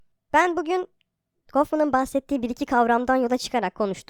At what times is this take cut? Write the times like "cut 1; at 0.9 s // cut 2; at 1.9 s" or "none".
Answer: none